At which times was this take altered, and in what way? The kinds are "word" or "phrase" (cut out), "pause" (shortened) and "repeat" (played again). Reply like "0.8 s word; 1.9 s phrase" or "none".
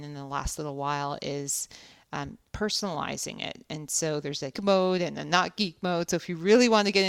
4.5 s word